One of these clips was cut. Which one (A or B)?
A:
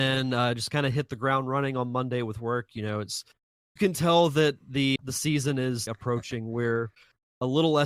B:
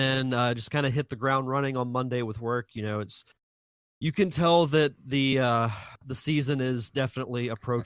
A